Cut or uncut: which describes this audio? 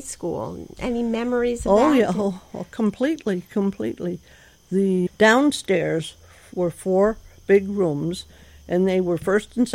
cut